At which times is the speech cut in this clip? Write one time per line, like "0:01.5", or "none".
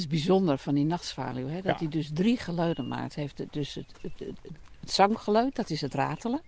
none